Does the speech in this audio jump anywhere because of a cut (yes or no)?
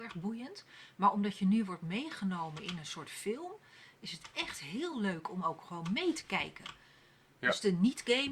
no